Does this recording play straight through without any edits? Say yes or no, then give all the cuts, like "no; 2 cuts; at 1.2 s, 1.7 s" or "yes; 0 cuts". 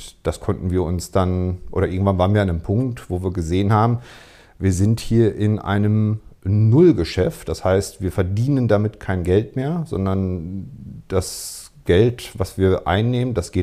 yes; 0 cuts